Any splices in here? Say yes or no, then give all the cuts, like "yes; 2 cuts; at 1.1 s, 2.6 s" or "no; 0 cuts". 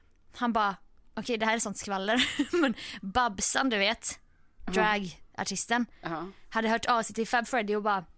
no; 0 cuts